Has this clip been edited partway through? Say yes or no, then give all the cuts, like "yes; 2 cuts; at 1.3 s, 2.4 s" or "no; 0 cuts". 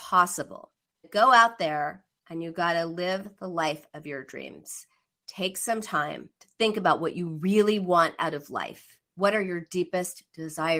yes; 3 cuts; at 1.0 s, 6.4 s, 9.0 s